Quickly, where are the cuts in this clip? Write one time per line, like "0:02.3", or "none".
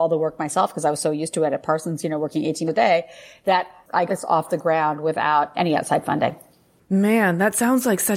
0:02.7
0:04.1
0:05.5